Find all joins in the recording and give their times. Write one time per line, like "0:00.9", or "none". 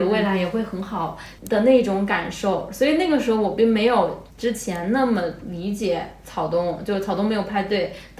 0:01.4
0:04.3